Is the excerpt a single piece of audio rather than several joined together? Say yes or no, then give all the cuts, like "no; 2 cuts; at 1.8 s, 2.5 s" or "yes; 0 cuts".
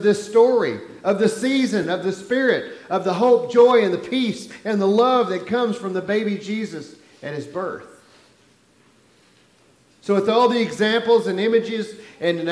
yes; 0 cuts